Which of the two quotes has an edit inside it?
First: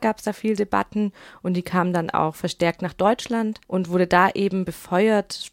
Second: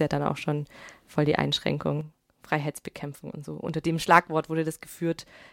first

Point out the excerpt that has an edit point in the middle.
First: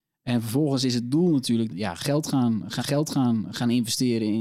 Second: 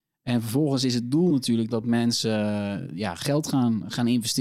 first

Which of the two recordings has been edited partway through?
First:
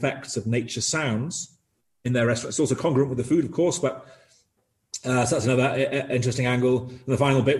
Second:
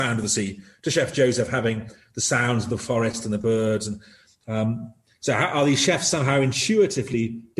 first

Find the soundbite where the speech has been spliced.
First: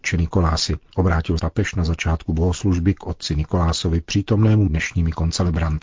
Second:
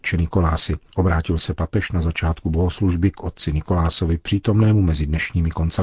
first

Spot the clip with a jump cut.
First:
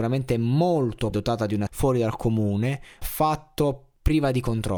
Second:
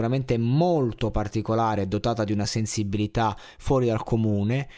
first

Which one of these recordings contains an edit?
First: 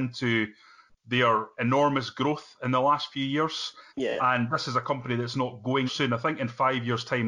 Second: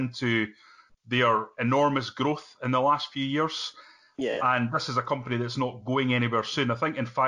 first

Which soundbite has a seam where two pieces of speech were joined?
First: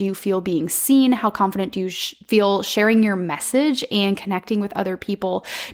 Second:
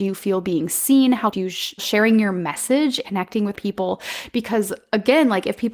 second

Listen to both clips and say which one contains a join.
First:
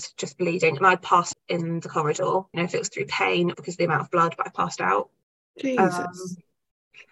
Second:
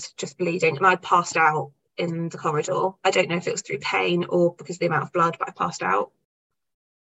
first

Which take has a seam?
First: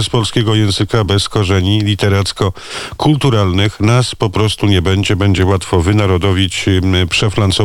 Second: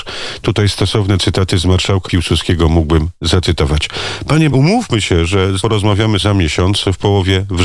second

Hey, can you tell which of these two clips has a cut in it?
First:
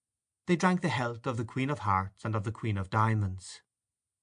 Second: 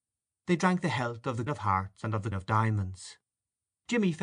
second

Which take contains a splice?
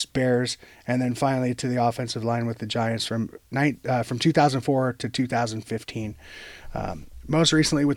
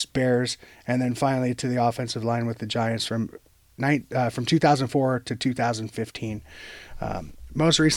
first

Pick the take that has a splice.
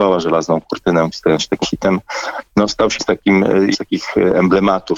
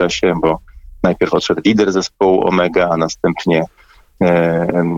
first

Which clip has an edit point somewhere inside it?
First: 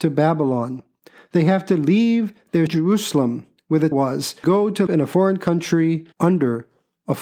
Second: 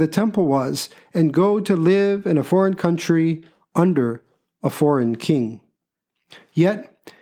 first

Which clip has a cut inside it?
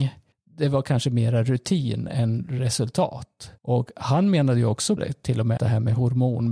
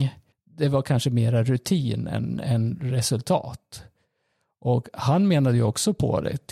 first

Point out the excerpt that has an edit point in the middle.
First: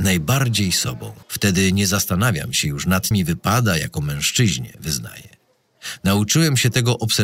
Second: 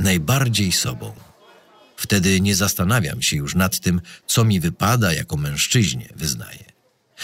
first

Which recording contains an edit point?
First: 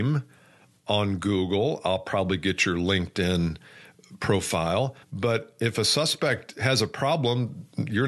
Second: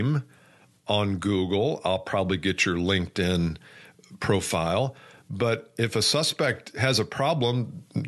first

